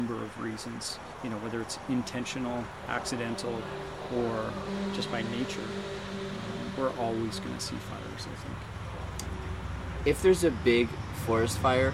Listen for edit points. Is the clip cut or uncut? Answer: uncut